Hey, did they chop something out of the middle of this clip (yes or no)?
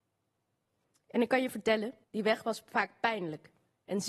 yes